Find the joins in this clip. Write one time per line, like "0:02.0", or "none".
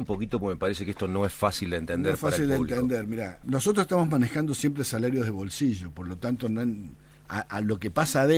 none